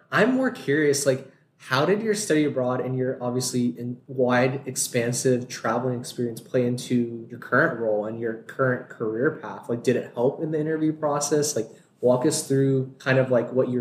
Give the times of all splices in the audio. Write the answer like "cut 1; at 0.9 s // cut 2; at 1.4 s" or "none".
none

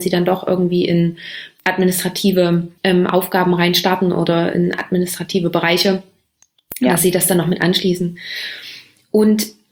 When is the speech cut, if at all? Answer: none

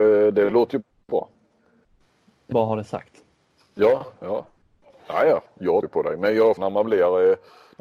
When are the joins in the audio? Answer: cut 1; at 2.5 s // cut 2; at 5.8 s // cut 3; at 6.6 s

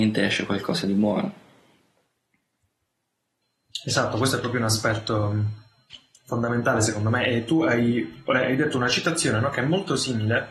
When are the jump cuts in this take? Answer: none

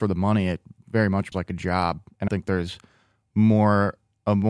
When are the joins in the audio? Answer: cut 1; at 1.3 s // cut 2; at 2.3 s

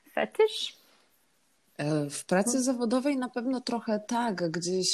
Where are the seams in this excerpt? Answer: none

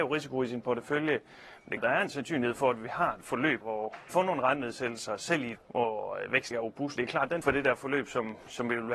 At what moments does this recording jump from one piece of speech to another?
cut 1; at 1.8 s // cut 2; at 3.6 s // cut 3; at 4.1 s // cut 4; at 5.6 s // cut 5; at 6.5 s // cut 6; at 7.0 s // cut 7; at 7.4 s

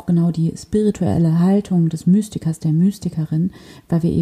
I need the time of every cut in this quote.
none

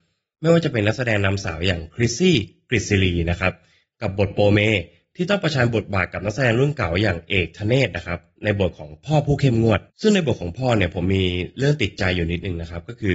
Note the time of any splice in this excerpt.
cut 1; at 9.9 s

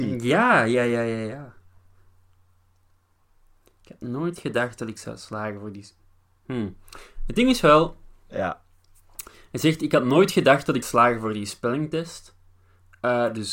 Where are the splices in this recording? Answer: cut 1; at 10.8 s

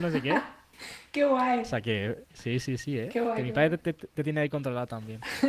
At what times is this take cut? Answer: none

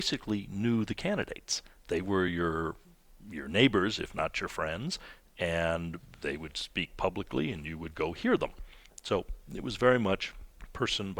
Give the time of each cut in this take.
none

